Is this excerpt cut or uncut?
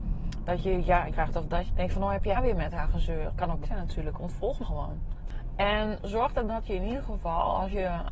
cut